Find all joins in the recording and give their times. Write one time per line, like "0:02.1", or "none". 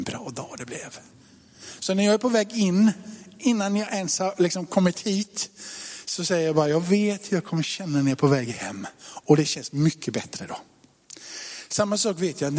none